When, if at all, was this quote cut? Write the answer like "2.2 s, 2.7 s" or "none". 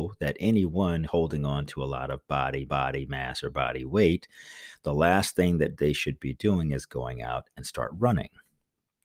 1.1 s, 2.7 s